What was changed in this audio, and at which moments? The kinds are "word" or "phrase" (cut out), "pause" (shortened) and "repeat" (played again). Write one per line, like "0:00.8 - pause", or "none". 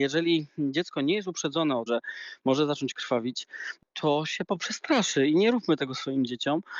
0:01.9 - word
0:04.6 - word